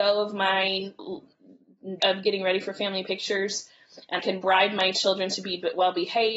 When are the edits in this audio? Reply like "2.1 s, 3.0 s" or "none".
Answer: 2.0 s, 4.2 s